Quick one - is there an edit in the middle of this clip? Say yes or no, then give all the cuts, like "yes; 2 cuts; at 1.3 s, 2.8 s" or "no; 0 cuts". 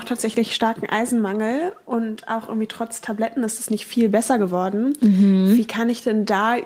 no; 0 cuts